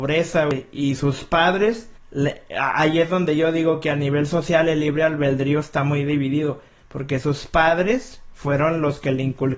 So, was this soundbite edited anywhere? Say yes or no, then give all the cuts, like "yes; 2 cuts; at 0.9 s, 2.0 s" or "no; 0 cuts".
yes; 1 cut; at 1.9 s